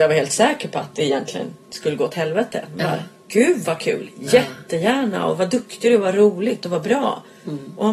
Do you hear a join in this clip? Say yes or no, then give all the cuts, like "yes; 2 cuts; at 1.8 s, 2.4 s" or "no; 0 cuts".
yes; 1 cut; at 1.6 s